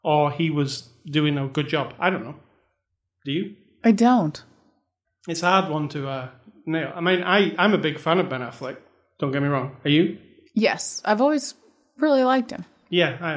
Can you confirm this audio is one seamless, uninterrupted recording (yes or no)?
yes